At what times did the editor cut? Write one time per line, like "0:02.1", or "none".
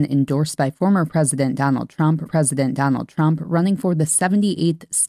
0:02.3